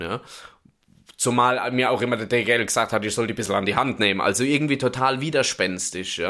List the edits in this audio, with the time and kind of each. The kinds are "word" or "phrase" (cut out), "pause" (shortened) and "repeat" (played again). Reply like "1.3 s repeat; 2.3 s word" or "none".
none